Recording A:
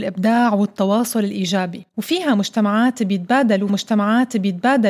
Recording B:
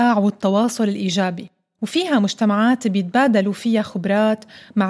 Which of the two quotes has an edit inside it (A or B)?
A